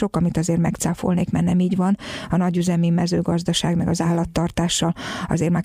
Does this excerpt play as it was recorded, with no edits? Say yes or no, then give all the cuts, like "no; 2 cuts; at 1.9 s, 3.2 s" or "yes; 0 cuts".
yes; 0 cuts